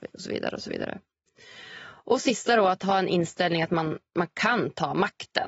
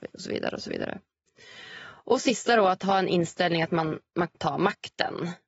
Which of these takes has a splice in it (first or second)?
second